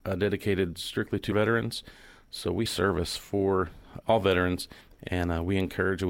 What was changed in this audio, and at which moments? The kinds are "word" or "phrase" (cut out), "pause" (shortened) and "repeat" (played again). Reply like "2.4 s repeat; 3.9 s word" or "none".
1.3 s word; 2.7 s phrase; 4.8 s pause